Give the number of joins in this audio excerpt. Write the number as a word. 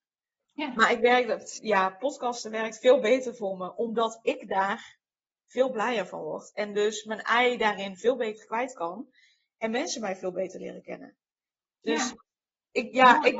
zero